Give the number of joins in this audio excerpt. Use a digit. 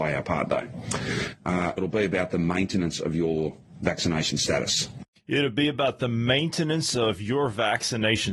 1